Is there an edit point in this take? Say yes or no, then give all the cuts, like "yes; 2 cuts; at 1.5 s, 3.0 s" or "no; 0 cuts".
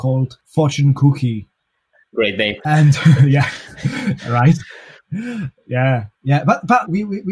no; 0 cuts